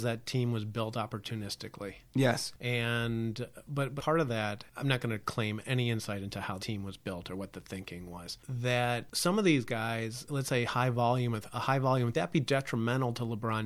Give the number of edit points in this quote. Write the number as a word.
three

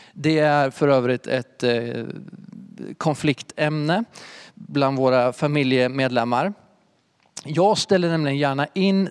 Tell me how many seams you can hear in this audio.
zero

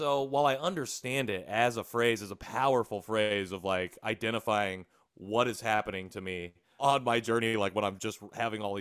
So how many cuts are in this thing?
one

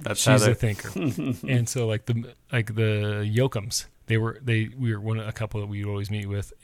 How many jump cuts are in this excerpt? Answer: one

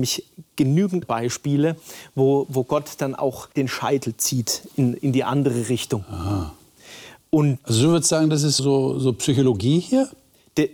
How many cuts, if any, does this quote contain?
four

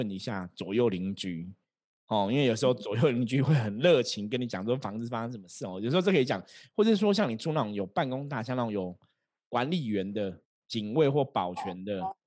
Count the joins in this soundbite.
zero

